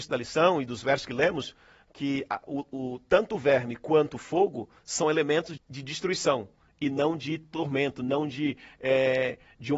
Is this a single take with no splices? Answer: no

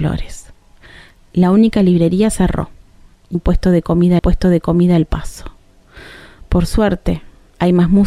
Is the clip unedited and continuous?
no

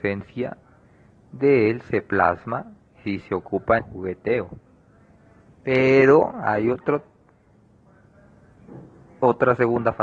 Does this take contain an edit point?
yes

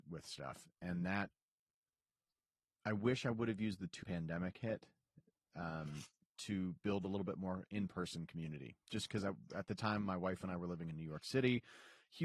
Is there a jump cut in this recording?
yes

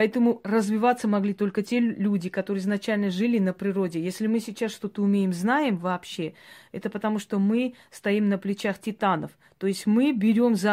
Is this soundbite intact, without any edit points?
yes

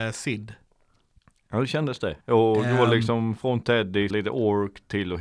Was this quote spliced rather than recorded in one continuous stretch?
yes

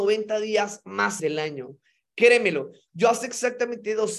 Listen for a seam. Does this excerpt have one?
yes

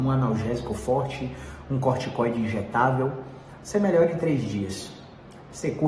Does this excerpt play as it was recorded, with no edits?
yes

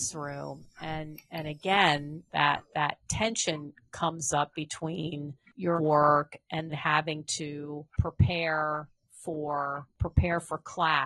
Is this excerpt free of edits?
no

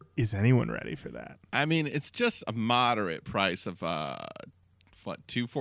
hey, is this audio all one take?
yes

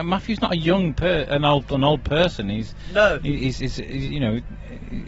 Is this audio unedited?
yes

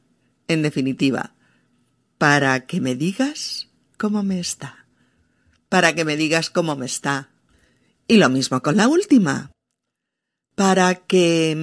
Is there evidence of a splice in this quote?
no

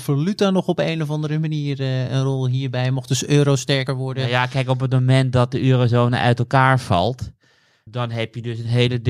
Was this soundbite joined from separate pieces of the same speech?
yes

